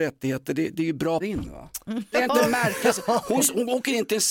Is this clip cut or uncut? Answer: cut